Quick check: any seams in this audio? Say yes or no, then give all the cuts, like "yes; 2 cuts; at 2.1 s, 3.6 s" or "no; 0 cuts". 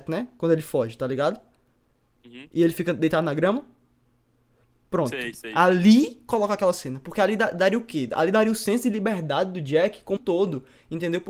yes; 1 cut; at 10.2 s